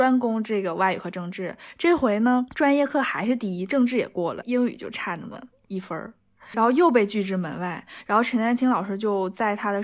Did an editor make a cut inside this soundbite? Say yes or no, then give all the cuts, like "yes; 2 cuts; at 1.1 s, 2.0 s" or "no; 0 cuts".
yes; 2 cuts; at 4.4 s, 6.5 s